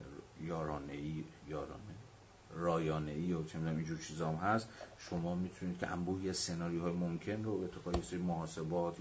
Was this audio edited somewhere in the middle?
no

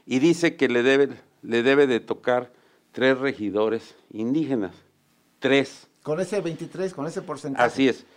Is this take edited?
no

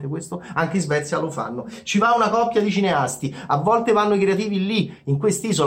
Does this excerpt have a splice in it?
no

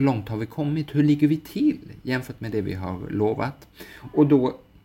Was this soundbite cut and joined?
no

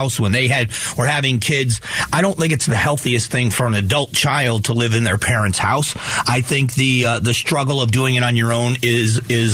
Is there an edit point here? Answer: no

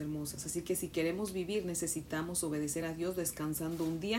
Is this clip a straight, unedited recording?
yes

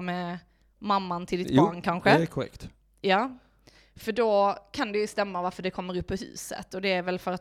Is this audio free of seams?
yes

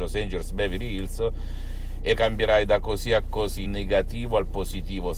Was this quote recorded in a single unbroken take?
no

